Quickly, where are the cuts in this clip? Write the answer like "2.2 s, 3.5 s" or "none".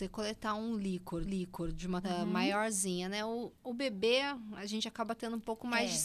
1.2 s, 2.0 s